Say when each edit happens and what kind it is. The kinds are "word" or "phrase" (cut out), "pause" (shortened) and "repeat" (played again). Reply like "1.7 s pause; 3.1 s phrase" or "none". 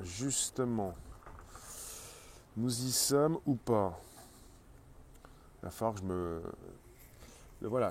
none